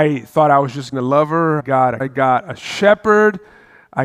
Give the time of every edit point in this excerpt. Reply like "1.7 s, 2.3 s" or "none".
0.9 s, 1.6 s, 2.0 s